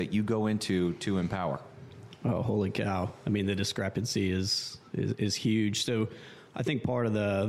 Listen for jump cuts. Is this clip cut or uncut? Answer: uncut